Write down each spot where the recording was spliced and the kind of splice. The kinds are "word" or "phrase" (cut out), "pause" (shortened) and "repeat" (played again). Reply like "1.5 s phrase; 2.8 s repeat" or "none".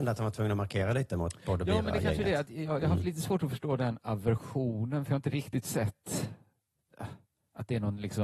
none